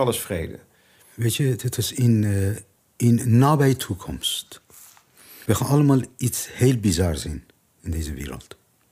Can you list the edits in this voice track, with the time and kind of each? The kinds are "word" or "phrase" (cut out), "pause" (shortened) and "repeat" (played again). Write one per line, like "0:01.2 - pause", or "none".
none